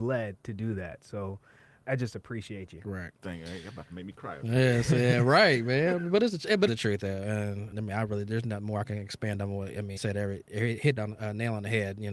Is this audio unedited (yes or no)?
no